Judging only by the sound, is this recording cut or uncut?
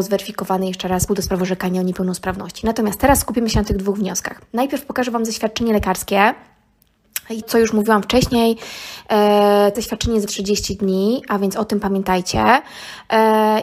cut